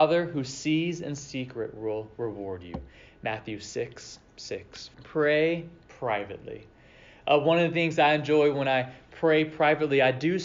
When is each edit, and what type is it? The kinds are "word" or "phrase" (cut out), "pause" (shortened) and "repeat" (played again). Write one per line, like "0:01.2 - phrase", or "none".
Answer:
0:04.9 - pause